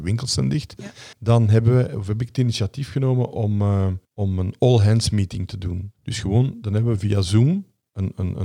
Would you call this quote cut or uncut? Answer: cut